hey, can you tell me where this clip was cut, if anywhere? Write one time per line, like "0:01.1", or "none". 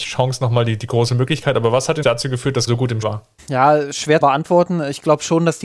0:02.0
0:02.7
0:03.0
0:03.4
0:04.2

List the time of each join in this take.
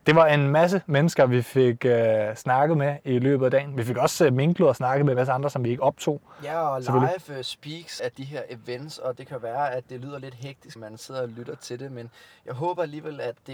0:08.0
0:10.8

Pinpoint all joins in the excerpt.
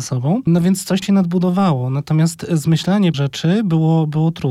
0:01.0
0:03.1

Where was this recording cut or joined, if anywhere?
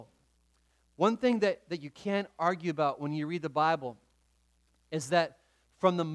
none

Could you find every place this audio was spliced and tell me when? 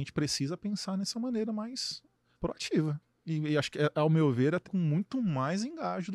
0:02.4
0:04.7

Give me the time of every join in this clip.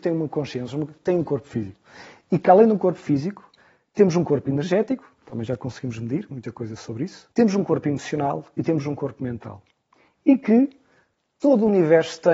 0:07.3

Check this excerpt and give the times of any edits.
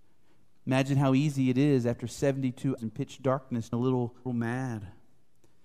0:02.8
0:03.7
0:04.3

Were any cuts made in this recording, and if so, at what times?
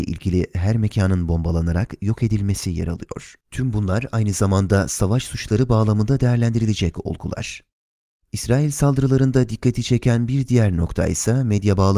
0:03.4

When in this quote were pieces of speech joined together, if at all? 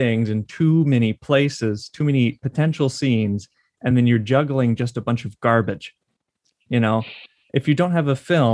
none

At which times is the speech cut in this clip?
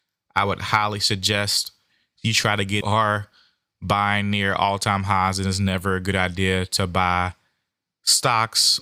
0:02.8

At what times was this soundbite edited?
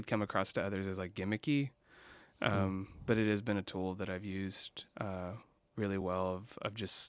none

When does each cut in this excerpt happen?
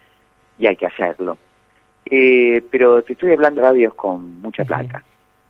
0:03.6

